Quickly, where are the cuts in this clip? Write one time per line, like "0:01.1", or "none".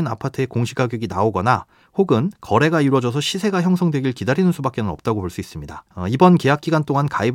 0:02.4
0:05.9